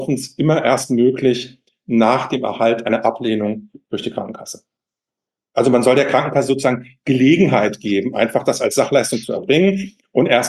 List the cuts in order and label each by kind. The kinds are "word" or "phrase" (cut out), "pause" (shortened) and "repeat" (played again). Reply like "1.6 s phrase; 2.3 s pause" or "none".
none